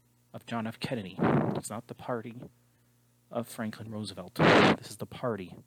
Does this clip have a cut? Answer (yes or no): no